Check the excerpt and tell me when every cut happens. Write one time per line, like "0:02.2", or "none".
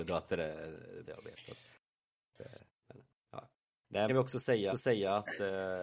0:01.0
0:02.7
0:04.1
0:04.7